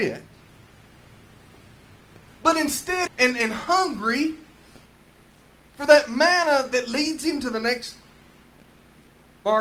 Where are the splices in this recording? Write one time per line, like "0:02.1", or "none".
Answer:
0:03.1